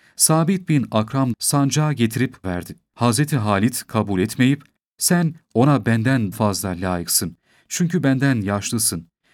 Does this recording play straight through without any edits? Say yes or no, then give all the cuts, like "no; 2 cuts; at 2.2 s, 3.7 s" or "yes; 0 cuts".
no; 3 cuts; at 1.3 s, 2.4 s, 6.3 s